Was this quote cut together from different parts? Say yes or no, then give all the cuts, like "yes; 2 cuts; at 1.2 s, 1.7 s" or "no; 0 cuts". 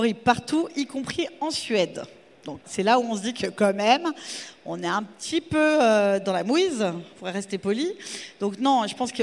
yes; 1 cut; at 2.6 s